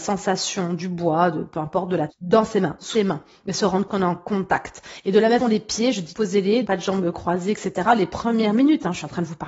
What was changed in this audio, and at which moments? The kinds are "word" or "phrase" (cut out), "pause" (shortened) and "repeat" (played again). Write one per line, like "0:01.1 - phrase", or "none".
0:02.1 - word
0:02.9 - word
0:03.9 - word
0:05.4 - word
0:06.1 - word
0:06.6 - word